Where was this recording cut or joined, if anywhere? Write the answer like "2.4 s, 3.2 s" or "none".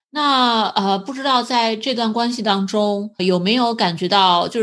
3.2 s

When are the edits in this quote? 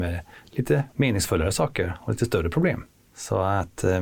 0.9 s, 3.0 s

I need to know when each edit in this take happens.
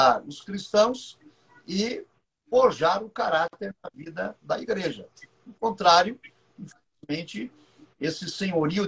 none

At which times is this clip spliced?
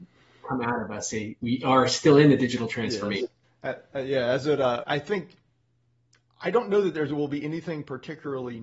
3.4 s, 4.8 s

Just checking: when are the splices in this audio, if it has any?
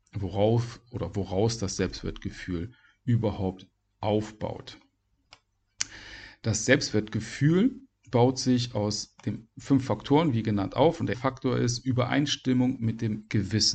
11.1 s

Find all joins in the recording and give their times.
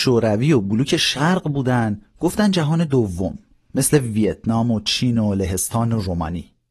none

